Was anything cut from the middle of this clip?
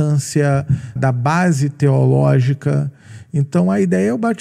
yes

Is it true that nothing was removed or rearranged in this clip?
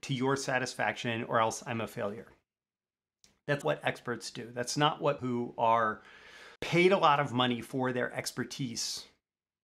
no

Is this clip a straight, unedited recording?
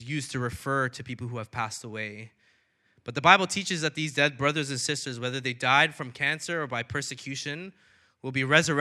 yes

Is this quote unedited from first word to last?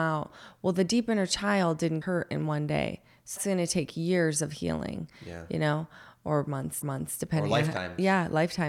no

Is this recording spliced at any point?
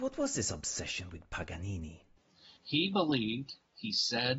yes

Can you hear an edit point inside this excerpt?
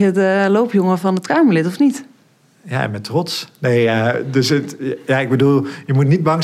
no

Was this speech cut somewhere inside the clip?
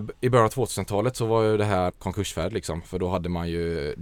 yes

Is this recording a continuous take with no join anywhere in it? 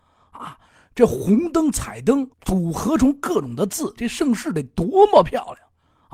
no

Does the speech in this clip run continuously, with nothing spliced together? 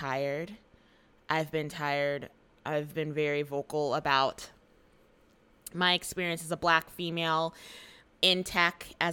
yes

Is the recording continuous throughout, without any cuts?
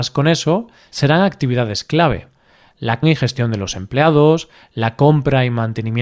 no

